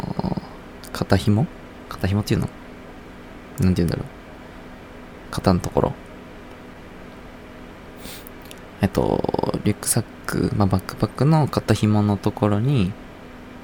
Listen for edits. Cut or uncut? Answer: uncut